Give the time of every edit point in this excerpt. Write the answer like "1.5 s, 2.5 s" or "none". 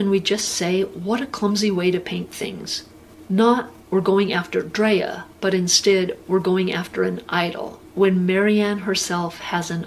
3.3 s